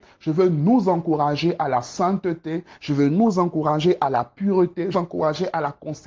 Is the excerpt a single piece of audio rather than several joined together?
no; 1 cut; at 4.9 s

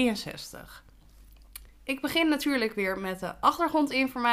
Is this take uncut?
yes; 0 cuts

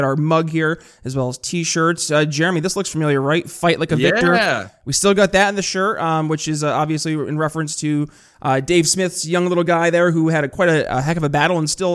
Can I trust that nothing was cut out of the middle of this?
yes; 0 cuts

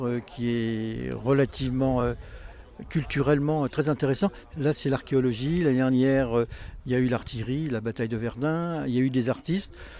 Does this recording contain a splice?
no; 0 cuts

